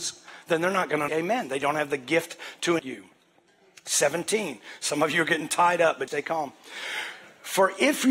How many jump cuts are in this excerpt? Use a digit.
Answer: 3